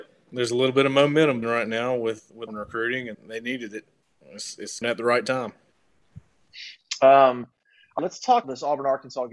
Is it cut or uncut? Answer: cut